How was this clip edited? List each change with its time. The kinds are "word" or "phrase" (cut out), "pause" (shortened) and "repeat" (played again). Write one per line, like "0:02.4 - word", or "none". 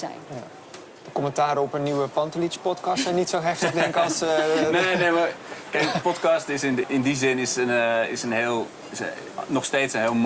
0:06.8 - word